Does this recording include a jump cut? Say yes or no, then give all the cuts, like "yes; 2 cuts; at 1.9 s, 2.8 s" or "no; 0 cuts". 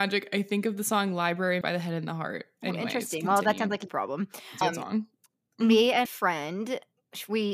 yes; 4 cuts; at 1.6 s, 3.9 s, 4.6 s, 6.1 s